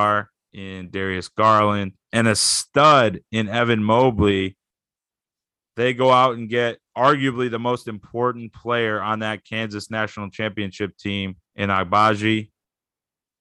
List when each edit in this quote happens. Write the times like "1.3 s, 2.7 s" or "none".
2.0 s, 6.9 s, 11.5 s